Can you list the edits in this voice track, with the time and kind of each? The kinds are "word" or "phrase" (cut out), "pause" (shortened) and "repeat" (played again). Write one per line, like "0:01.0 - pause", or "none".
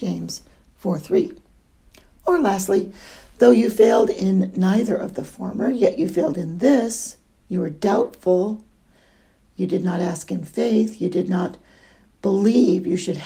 none